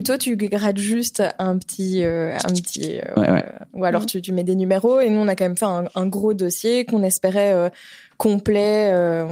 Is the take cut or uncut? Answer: uncut